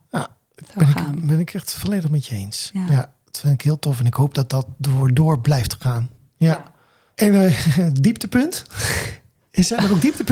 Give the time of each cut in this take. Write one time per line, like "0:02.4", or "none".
none